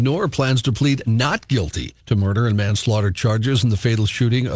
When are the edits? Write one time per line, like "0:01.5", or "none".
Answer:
0:02.0